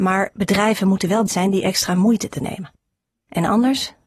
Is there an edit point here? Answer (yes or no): yes